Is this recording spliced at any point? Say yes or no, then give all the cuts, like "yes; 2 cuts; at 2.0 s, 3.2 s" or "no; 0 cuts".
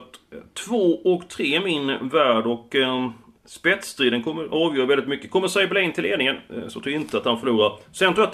no; 0 cuts